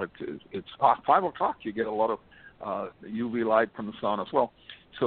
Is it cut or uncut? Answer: uncut